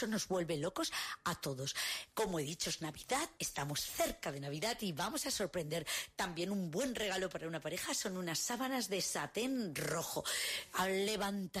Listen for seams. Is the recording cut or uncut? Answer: cut